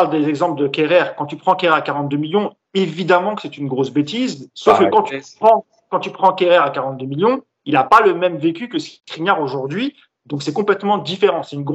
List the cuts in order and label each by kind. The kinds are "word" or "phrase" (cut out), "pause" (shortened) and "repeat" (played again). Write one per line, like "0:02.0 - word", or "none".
none